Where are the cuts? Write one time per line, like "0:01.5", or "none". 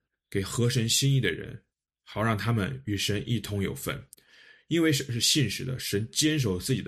0:01.7